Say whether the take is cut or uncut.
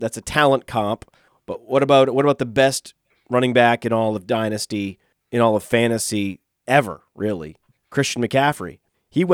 uncut